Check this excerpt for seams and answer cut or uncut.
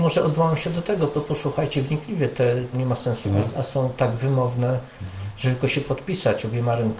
cut